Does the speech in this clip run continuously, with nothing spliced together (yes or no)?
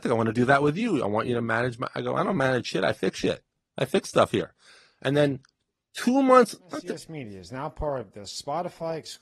yes